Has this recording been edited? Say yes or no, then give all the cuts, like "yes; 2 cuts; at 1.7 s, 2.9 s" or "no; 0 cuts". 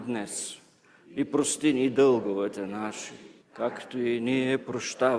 yes; 1 cut; at 3.4 s